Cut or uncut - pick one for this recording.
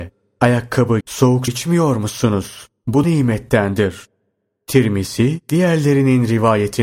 cut